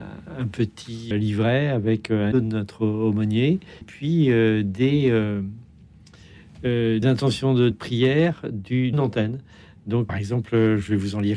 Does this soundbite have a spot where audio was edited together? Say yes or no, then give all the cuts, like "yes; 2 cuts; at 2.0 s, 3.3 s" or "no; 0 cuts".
yes; 7 cuts; at 1.1 s, 2.3 s, 3.8 s, 7.0 s, 7.7 s, 8.9 s, 10.1 s